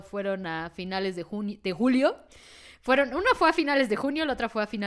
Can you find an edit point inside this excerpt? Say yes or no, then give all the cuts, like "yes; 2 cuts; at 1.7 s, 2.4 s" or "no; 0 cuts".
no; 0 cuts